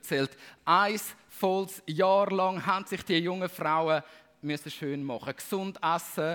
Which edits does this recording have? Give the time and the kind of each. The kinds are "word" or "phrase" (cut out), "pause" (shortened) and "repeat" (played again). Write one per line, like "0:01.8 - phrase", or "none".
none